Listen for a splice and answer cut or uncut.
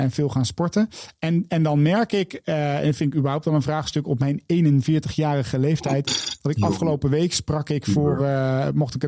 uncut